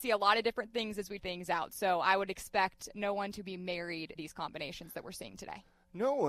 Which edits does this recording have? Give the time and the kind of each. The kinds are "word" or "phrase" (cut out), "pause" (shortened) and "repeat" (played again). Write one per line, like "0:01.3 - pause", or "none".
0:01.2 - word
0:04.2 - word